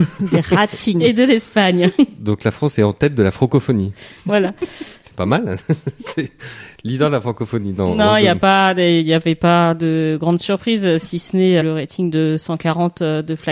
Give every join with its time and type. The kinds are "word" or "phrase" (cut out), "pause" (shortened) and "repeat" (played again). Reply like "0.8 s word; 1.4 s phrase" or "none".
11.6 s word